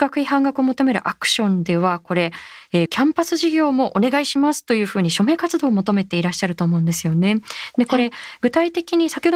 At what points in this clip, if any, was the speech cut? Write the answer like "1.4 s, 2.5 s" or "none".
2.9 s